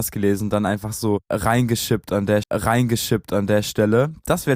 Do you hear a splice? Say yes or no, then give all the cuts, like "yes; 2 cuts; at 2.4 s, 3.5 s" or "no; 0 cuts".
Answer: yes; 1 cut; at 2.4 s